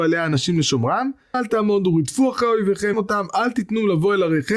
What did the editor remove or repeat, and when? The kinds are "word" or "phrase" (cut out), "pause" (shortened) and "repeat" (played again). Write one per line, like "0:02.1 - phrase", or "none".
0:01.3 - word
0:02.9 - word